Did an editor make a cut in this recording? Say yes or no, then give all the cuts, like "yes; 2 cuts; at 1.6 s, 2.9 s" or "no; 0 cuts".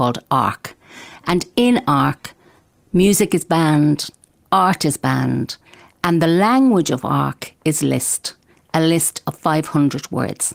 no; 0 cuts